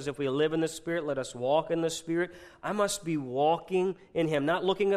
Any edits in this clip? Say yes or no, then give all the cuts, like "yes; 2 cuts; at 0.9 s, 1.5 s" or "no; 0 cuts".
no; 0 cuts